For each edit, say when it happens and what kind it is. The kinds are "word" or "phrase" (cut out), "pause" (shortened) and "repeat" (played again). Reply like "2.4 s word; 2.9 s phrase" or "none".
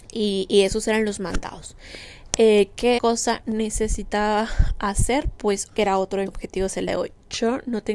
3.0 s word; 5.7 s word; 6.3 s word; 6.9 s word